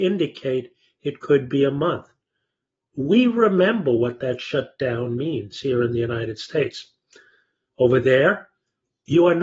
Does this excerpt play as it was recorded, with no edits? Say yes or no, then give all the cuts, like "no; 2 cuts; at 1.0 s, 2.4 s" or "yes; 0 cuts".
yes; 0 cuts